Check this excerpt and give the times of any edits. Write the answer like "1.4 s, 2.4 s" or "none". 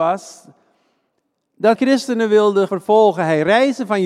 1.7 s, 2.7 s